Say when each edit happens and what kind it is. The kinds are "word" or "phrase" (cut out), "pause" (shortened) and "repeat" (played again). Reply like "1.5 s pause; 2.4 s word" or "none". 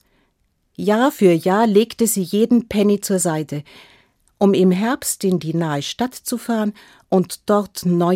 none